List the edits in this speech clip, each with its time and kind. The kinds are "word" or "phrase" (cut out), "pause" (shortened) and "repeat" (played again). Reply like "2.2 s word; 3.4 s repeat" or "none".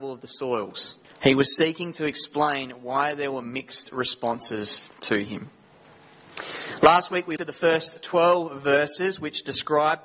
1.0 s pause; 7.4 s word